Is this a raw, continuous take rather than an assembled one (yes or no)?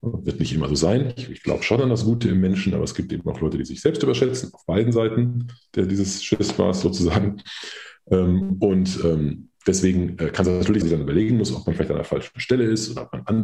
no